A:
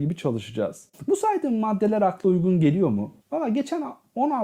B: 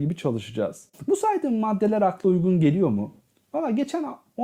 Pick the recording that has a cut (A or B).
A